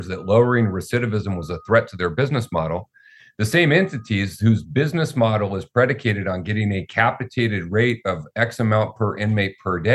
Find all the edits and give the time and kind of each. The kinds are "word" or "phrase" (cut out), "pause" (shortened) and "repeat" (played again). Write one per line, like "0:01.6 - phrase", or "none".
none